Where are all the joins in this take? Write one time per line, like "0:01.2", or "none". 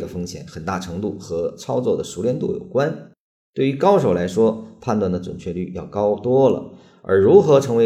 none